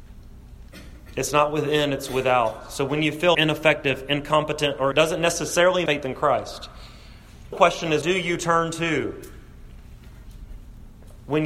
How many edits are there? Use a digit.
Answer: 5